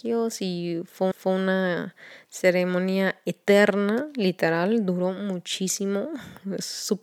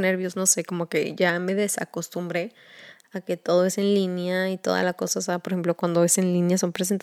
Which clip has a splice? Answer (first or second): first